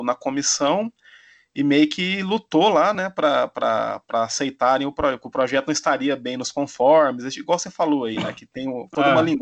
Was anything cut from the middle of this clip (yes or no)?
no